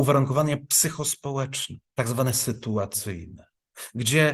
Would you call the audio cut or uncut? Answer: cut